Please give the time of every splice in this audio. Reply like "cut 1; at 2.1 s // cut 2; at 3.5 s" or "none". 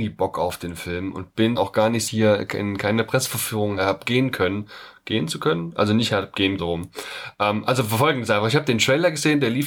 cut 1; at 1.5 s // cut 2; at 2.1 s // cut 3; at 3.8 s // cut 4; at 6.6 s